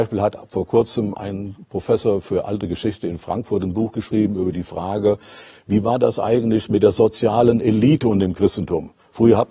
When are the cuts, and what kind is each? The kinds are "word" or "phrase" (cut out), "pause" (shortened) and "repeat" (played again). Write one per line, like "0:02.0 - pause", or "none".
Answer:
none